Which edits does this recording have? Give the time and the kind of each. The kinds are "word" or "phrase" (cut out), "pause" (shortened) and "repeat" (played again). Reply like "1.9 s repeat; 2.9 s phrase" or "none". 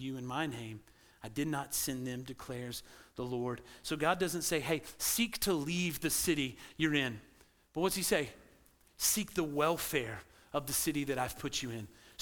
none